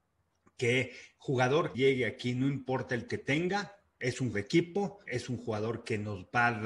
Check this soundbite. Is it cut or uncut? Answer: cut